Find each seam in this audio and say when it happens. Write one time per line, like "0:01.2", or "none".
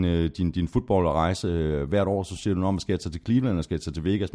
none